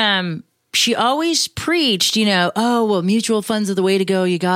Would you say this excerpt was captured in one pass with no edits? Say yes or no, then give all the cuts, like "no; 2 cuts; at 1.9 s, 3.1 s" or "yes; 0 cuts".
yes; 0 cuts